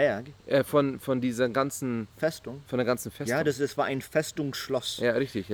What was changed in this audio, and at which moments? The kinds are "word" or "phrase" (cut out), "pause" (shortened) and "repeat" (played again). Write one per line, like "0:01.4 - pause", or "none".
none